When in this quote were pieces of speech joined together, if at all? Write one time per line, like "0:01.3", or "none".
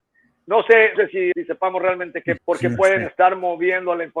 0:00.9
0:01.3
0:02.4